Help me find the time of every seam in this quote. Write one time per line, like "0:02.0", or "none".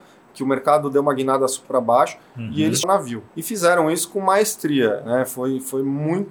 0:01.6
0:02.8
0:03.3